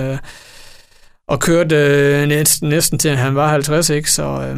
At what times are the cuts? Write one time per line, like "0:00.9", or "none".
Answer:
none